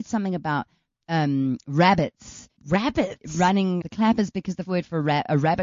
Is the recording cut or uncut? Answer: cut